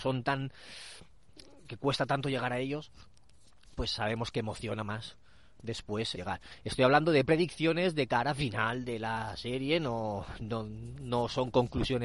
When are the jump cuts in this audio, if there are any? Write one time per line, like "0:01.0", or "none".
0:06.1